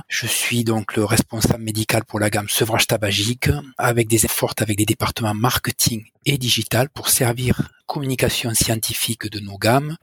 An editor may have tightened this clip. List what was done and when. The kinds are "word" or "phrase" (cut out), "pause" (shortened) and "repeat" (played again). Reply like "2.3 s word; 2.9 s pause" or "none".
4.3 s word; 7.8 s word